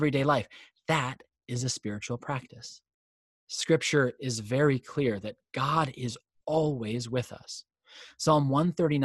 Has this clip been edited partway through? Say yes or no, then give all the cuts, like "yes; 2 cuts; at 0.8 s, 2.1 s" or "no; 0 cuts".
no; 0 cuts